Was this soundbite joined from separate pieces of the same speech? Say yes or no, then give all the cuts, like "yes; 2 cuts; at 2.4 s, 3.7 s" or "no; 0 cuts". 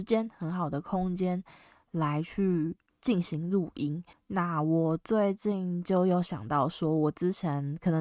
yes; 1 cut; at 4.1 s